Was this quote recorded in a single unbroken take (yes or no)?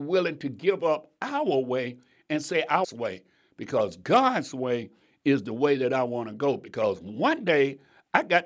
no